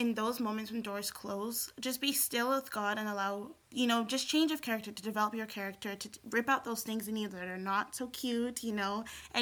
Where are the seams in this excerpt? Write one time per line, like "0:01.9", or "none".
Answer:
none